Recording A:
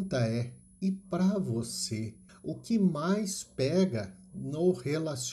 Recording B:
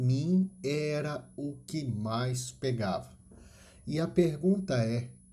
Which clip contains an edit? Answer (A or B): A